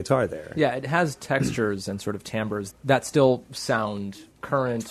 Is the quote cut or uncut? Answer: cut